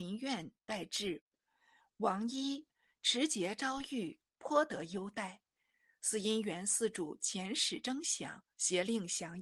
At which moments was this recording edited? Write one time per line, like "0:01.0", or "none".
0:08.5